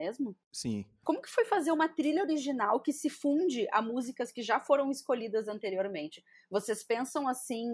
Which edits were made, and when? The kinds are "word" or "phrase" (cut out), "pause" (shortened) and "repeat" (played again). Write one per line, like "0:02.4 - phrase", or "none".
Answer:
none